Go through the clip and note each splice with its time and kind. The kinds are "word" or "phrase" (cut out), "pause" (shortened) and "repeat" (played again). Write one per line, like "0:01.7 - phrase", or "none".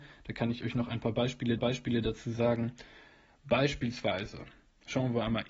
0:01.6 - repeat